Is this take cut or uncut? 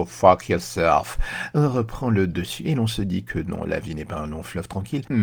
uncut